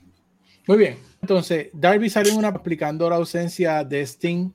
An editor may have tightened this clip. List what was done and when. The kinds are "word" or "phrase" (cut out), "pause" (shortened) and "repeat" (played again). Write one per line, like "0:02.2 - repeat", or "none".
0:01.2 - word
0:02.5 - word